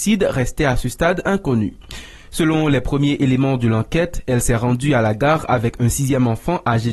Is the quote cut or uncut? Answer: uncut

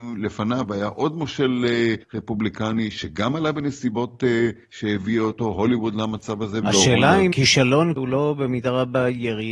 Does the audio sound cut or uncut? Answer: cut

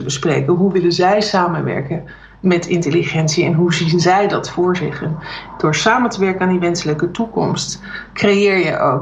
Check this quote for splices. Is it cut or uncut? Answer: uncut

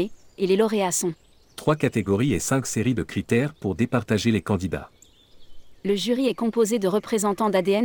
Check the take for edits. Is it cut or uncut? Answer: cut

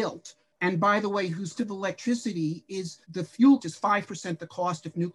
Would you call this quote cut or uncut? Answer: cut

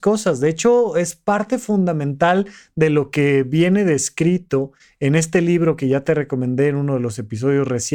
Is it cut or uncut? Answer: uncut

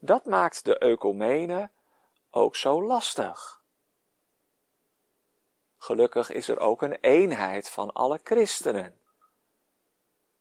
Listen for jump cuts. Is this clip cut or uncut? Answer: uncut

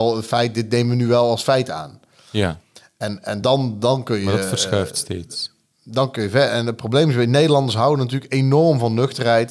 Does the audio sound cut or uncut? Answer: uncut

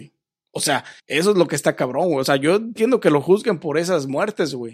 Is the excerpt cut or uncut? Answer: cut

